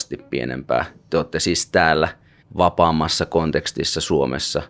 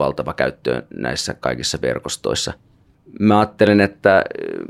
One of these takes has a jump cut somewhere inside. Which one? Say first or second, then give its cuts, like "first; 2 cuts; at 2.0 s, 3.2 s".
first; 1 cut; at 2.4 s